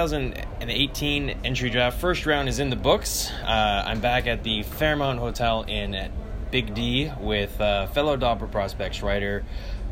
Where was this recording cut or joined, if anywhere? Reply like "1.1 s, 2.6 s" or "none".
none